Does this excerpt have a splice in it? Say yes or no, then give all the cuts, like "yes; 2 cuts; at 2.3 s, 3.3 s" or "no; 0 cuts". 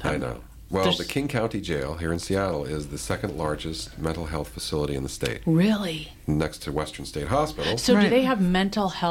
no; 0 cuts